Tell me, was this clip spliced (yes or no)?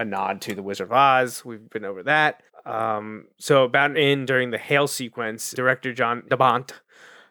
yes